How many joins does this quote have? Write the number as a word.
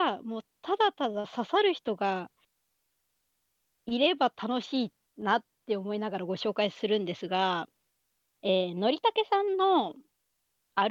zero